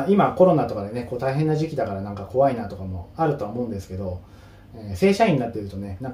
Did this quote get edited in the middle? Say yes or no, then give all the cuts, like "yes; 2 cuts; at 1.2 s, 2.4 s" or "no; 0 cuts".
no; 0 cuts